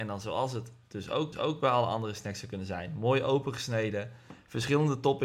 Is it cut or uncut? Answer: cut